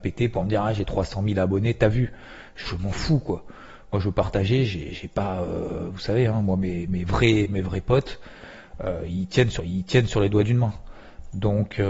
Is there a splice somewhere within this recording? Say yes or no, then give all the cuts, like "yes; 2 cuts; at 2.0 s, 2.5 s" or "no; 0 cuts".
yes; 1 cut; at 9.6 s